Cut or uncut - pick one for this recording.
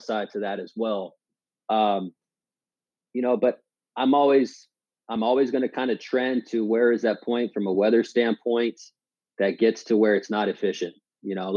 uncut